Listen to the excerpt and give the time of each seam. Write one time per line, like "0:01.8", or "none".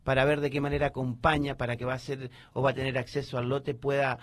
0:01.8